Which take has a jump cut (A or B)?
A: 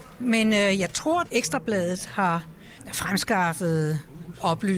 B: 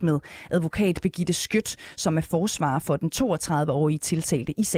A